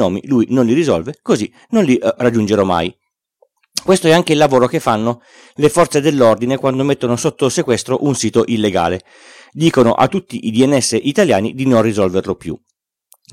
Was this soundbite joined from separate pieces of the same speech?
no; 0 cuts

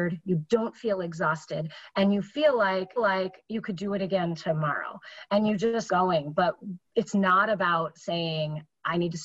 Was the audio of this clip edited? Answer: yes; 3 cuts; at 3.0 s, 5.9 s, 6.9 s

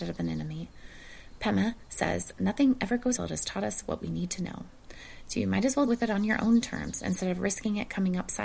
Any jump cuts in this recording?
yes; 2 cuts; at 3.2 s, 5.9 s

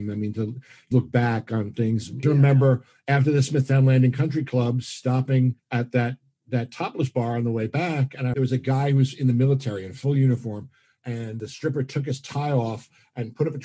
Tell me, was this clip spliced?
yes; 2 cuts; at 0.9 s, 8.3 s

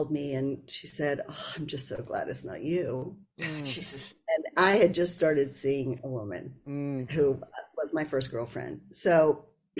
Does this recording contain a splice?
no; 0 cuts

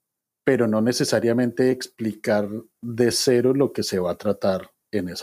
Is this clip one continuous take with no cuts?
yes; 0 cuts

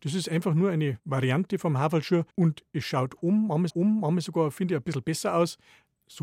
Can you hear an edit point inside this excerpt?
yes; 2 cuts; at 2.3 s, 3.7 s

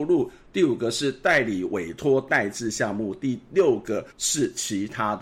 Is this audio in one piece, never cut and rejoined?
no; 1 cut; at 4.1 s

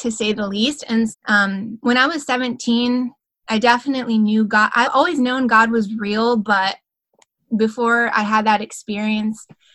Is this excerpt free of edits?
no; 2 cuts; at 1.1 s, 4.8 s

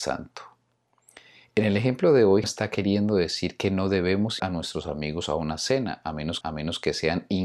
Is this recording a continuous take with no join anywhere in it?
no; 3 cuts; at 2.4 s, 4.4 s, 6.4 s

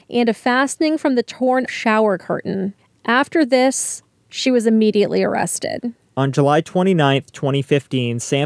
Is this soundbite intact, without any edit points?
no; 1 cut; at 1.7 s

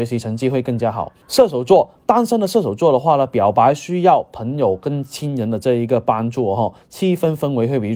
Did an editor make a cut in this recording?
yes; 1 cut; at 1.2 s

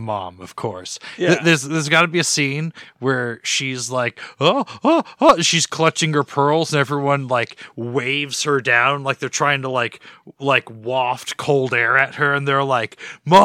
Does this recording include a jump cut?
no; 0 cuts

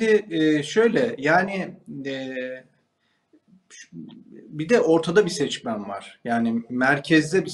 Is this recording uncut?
yes; 0 cuts

